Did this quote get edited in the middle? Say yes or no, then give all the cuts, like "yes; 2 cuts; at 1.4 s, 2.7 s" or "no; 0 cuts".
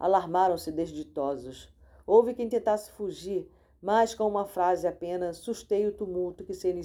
no; 0 cuts